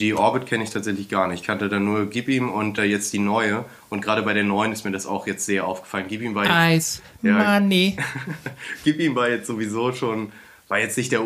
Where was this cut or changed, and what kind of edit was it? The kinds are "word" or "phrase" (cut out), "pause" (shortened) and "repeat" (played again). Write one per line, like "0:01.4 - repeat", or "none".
none